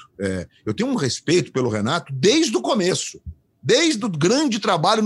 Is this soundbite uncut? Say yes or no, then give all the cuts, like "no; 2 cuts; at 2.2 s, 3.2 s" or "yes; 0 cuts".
yes; 0 cuts